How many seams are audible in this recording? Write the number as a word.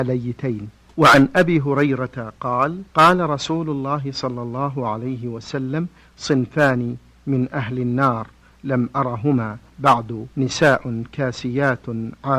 two